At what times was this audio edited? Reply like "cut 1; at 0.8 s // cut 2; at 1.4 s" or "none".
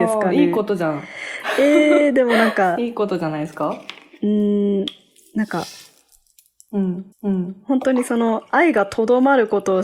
cut 1; at 7.1 s